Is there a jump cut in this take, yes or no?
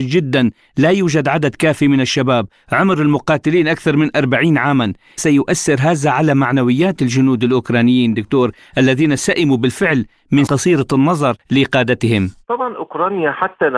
yes